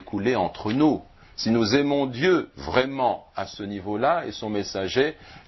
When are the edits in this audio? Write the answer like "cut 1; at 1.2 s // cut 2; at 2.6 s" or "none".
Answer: none